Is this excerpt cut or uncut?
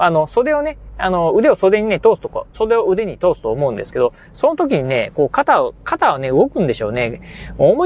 cut